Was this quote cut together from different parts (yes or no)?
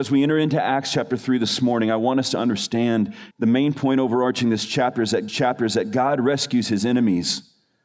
yes